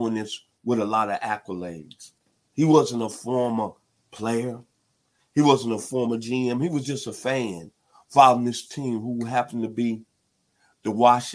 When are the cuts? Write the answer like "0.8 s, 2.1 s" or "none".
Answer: none